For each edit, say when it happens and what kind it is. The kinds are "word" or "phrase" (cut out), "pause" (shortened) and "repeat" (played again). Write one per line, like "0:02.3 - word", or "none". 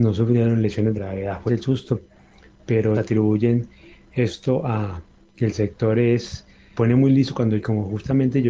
0:01.0 - word
0:01.5 - word
0:02.9 - word
0:06.7 - word
0:07.6 - word